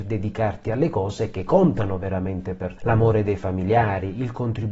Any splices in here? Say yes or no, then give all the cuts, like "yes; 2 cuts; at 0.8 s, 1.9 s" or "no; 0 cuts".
yes; 1 cut; at 2.8 s